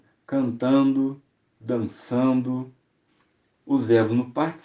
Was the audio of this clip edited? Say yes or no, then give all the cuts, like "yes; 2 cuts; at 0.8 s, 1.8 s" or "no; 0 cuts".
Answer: yes; 1 cut; at 3.1 s